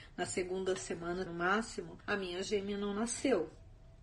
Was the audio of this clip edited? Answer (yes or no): yes